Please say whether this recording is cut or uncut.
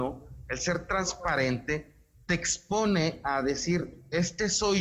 uncut